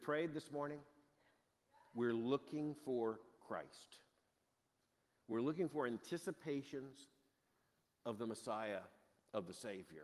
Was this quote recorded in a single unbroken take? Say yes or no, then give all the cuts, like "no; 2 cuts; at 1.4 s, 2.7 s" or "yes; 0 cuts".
yes; 0 cuts